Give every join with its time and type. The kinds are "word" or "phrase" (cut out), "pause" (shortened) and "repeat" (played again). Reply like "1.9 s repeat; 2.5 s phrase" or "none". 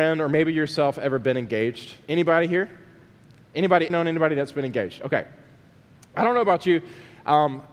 3.9 s word